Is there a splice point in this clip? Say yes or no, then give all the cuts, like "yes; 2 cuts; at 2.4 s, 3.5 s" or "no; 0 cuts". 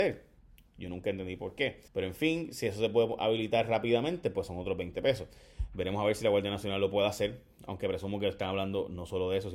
yes; 1 cut; at 1.9 s